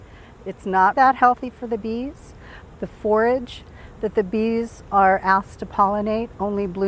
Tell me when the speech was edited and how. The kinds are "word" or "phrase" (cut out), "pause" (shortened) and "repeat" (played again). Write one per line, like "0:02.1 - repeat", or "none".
0:00.9 - word